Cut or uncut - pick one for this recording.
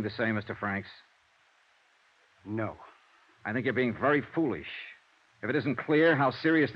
uncut